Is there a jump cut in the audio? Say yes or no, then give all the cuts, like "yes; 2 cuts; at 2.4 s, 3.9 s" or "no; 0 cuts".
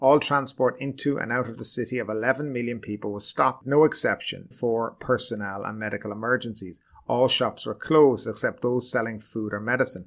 yes; 1 cut; at 4.5 s